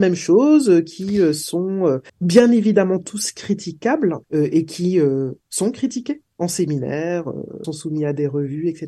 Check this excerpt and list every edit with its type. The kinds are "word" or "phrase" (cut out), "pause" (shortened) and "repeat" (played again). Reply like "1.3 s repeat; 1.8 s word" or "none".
2.1 s pause; 4.2 s pause; 6.3 s pause; 7.6 s word